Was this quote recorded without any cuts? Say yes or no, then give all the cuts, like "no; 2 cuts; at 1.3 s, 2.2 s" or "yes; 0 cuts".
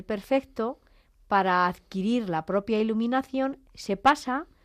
yes; 0 cuts